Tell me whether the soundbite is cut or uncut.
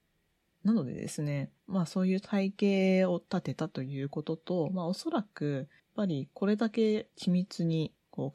cut